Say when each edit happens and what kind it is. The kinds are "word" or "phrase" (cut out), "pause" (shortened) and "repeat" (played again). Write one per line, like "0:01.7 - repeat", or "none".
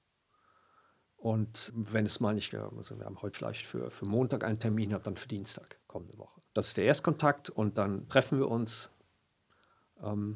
0:01.7 - word
0:02.5 - phrase
0:03.3 - phrase
0:05.8 - pause
0:06.5 - pause